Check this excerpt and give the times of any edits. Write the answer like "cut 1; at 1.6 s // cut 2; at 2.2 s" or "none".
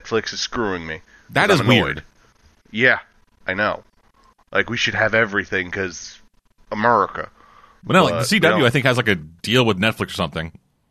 none